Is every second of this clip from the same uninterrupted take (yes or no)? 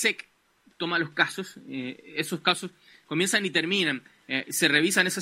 yes